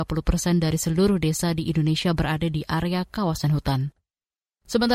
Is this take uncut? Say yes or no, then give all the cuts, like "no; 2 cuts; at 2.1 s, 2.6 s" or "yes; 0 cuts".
yes; 0 cuts